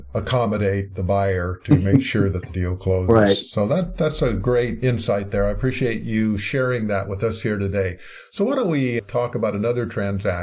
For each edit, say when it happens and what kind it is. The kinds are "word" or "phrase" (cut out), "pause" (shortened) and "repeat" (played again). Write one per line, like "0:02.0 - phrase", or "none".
none